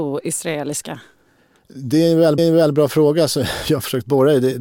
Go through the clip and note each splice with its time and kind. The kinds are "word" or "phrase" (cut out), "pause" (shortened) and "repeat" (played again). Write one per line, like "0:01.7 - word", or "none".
0:02.4 - repeat